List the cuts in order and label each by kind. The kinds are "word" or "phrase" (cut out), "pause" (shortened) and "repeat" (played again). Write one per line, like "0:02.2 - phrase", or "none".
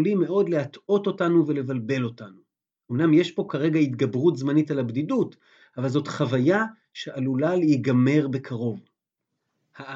none